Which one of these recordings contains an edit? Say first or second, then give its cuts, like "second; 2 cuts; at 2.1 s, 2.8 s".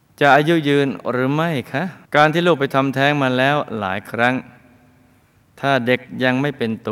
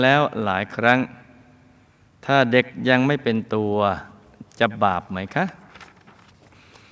first; 1 cut; at 2.1 s